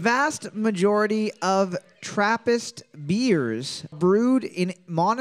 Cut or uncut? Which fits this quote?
cut